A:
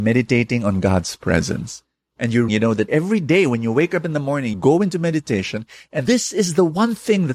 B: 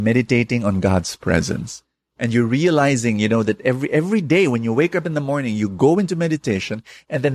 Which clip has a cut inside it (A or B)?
A